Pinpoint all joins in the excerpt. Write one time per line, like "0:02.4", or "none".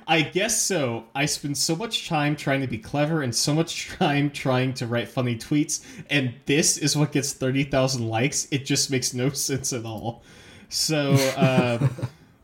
none